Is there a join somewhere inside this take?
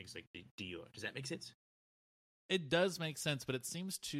no; 0 cuts

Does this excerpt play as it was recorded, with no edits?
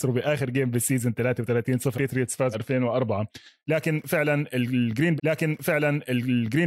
no; 3 cuts; at 1.9 s, 2.5 s, 5.2 s

